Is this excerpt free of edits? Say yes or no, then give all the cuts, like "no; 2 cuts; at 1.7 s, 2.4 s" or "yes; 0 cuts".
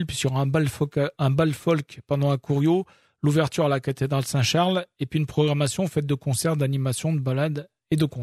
yes; 0 cuts